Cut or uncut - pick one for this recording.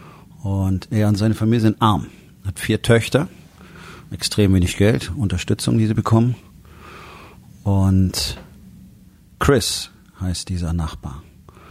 uncut